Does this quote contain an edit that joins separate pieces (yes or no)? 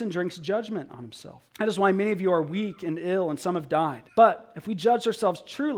yes